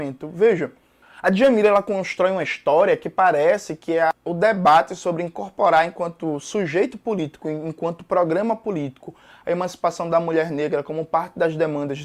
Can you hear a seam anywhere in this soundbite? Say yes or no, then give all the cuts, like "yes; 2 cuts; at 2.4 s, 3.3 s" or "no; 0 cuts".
no; 0 cuts